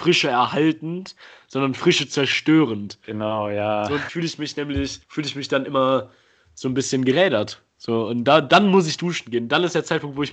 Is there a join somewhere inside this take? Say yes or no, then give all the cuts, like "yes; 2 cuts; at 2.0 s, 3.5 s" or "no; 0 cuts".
yes; 2 cuts; at 4.1 s, 5.0 s